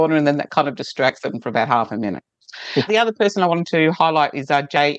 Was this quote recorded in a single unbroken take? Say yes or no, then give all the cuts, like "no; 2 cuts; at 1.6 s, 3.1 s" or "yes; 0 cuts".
no; 1 cut; at 2.9 s